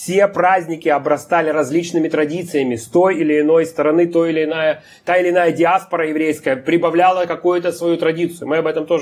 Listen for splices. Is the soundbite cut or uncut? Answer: uncut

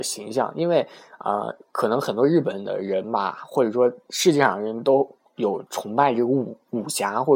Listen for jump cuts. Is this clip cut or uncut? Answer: cut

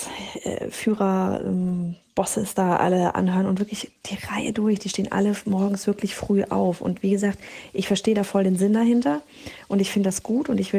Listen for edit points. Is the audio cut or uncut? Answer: uncut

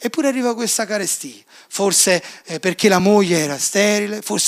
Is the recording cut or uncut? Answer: uncut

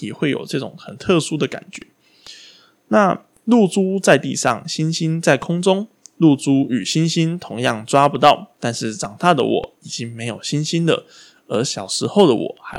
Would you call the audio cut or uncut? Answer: uncut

